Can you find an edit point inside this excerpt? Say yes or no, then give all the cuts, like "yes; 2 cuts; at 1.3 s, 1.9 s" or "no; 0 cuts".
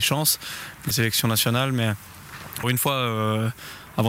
yes; 2 cuts; at 0.9 s, 2.6 s